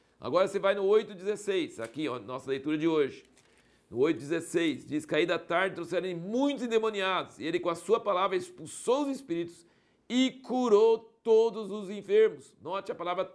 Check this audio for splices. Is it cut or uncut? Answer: uncut